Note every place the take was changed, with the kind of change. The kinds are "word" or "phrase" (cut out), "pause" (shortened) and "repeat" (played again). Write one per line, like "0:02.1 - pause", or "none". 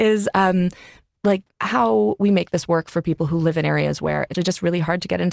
0:01.5 - pause
0:04.3 - word